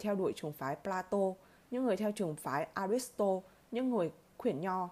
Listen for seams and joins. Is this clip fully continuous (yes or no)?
yes